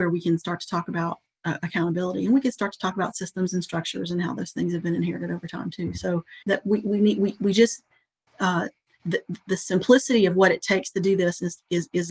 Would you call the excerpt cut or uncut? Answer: cut